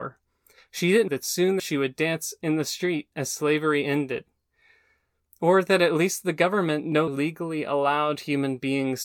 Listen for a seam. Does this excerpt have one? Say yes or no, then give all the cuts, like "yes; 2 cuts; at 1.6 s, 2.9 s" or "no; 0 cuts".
yes; 3 cuts; at 1.1 s, 1.6 s, 7.1 s